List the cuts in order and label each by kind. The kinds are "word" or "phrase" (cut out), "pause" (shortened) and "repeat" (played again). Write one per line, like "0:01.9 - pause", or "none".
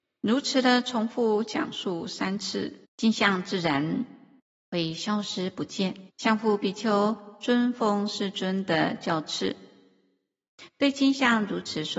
0:02.8 - pause
0:04.4 - pause
0:06.1 - pause